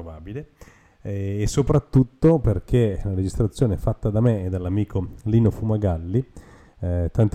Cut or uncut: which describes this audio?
uncut